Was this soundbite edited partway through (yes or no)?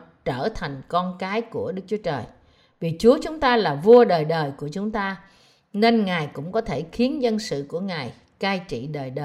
no